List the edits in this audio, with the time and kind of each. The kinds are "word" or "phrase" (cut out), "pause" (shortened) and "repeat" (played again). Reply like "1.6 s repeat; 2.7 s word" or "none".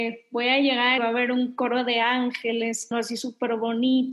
1.0 s word; 2.9 s word